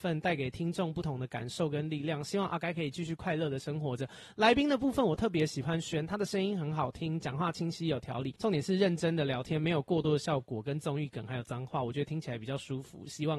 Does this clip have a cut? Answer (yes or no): yes